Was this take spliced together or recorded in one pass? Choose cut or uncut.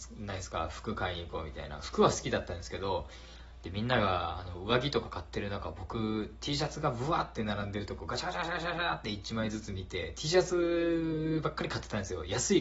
uncut